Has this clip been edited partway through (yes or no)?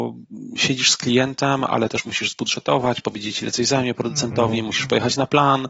no